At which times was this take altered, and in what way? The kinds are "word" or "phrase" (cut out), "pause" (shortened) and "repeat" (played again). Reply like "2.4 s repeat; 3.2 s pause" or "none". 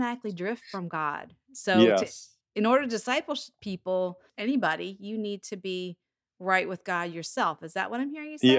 none